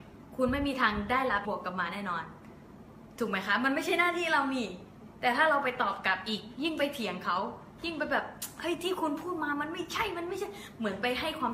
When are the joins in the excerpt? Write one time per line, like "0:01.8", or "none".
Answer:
0:01.4